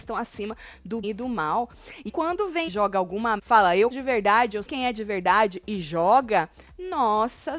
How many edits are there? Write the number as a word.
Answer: six